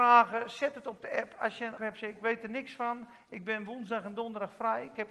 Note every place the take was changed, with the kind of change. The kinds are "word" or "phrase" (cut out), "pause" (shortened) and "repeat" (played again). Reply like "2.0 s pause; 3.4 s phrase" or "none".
1.8 s word